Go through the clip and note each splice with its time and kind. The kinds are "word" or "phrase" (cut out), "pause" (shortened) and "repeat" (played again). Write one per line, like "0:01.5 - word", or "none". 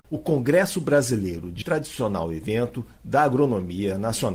0:01.6 - phrase